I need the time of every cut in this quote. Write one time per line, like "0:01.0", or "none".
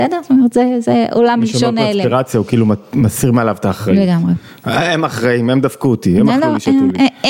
none

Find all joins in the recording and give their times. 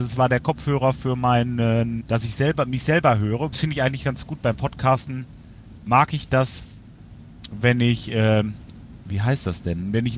0:02.0
0:03.5

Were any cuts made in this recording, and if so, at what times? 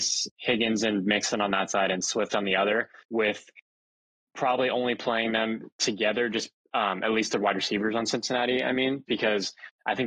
0:03.0
0:09.1

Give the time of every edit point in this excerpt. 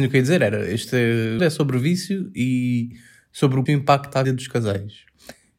0:01.4
0:03.7
0:04.2

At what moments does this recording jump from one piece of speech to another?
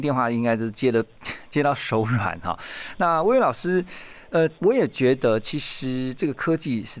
0:04.6

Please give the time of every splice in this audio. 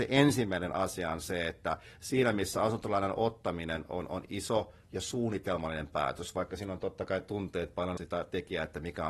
0:08.0

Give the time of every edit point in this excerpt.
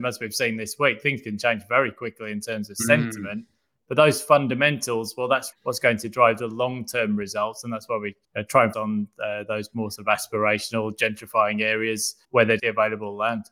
0:05.5
0:08.2
0:08.7
0:12.2
0:12.6

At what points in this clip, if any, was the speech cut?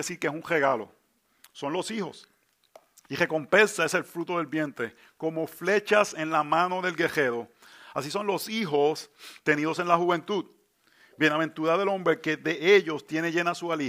none

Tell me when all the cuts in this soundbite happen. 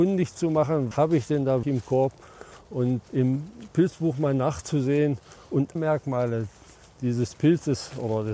0:00.9
0:01.6
0:03.0
0:05.8

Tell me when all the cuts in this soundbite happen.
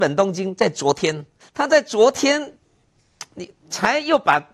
0:01.4

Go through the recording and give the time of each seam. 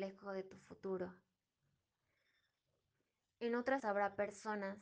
0:03.8

